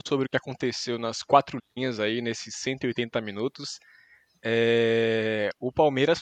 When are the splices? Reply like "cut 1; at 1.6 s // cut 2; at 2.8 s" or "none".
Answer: none

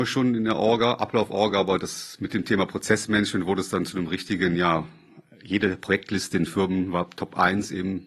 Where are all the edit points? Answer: none

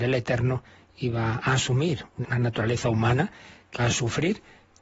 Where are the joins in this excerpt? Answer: cut 1; at 2.2 s // cut 2; at 3.8 s

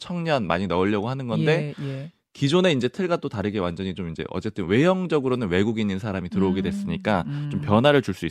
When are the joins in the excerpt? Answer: none

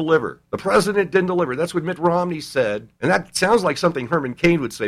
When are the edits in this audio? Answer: cut 1; at 2.9 s

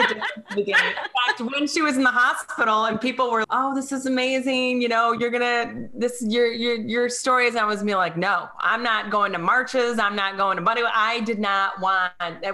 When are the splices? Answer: cut 1; at 3.4 s

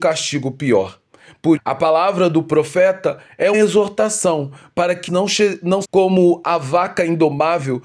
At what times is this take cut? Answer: cut 1; at 1.6 s // cut 2; at 3.5 s // cut 3; at 5.1 s // cut 4; at 5.8 s

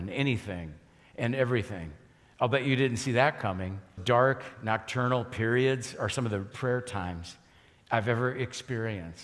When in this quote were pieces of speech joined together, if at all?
cut 1; at 4.0 s // cut 2; at 6.5 s

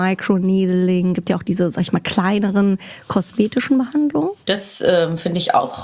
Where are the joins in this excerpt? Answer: cut 1; at 4.4 s

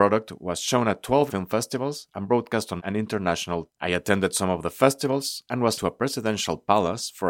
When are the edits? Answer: cut 1; at 1.3 s // cut 2; at 2.8 s // cut 3; at 3.7 s // cut 4; at 5.8 s

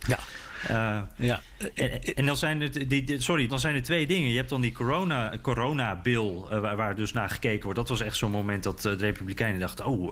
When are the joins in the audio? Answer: cut 1; at 3.5 s

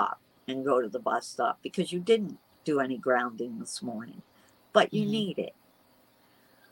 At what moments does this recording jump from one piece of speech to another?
none

